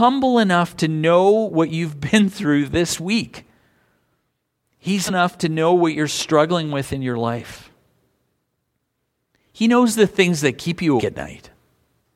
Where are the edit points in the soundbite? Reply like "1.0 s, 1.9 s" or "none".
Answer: 5.1 s, 11.0 s

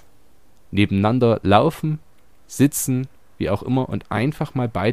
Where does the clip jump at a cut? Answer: none

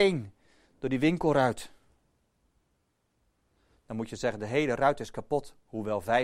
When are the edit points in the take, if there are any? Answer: none

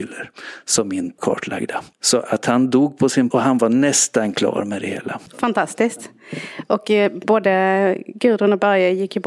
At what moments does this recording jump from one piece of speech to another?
1.2 s, 1.9 s, 3.3 s, 5.3 s

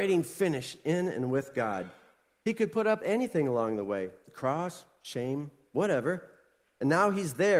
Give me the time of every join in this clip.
3.0 s

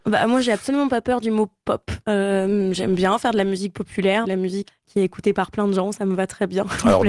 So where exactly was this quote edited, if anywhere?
2.0 s, 4.2 s, 4.7 s

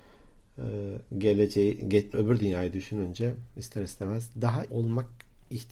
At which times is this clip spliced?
2.1 s, 4.7 s

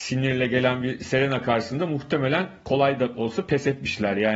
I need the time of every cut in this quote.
none

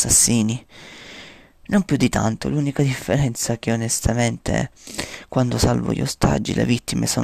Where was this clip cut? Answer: none

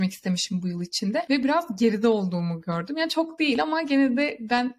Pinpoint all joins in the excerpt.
none

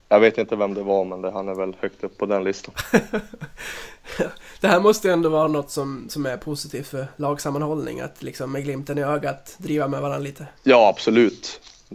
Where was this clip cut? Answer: 10.6 s

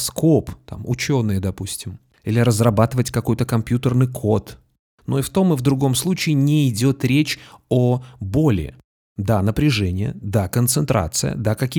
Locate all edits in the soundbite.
none

